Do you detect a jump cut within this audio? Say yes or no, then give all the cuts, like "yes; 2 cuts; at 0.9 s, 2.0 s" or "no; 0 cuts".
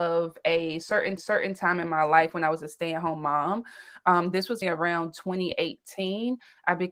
yes; 2 cuts; at 1.2 s, 4.6 s